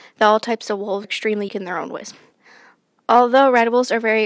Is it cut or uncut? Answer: cut